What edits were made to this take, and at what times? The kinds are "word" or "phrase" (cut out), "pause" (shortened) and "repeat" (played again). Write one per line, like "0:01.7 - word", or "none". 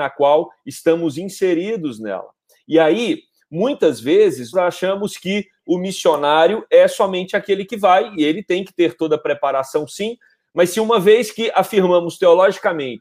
0:04.5 - word